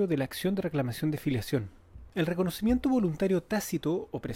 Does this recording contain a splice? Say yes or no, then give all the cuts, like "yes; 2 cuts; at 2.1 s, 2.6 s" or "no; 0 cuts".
yes; 1 cut; at 2.1 s